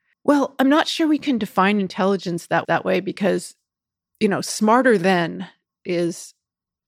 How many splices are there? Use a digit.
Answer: 1